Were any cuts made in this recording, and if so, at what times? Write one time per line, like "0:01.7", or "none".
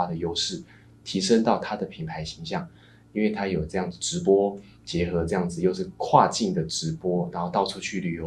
none